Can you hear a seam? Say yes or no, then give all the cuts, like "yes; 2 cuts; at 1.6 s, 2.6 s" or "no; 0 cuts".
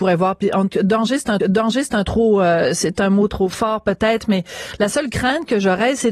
yes; 2 cuts; at 1.4 s, 3.3 s